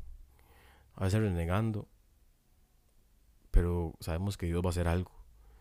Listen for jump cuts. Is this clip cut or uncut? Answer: uncut